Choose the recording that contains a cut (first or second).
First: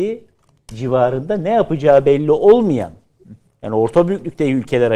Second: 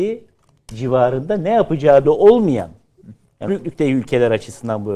second